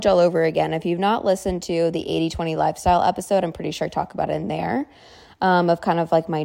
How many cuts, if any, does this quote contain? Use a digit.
0